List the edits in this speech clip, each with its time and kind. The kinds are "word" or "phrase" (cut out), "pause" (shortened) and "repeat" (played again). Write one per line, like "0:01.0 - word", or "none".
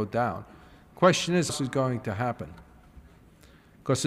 0:01.5 - word